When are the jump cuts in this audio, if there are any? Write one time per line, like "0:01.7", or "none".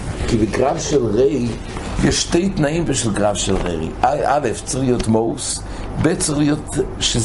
none